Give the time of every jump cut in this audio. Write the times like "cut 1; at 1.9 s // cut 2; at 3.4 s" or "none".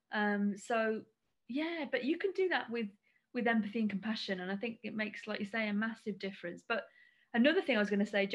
none